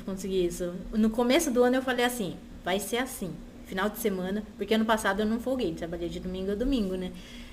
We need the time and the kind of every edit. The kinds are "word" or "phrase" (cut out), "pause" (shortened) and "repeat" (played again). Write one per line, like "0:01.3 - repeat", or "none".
none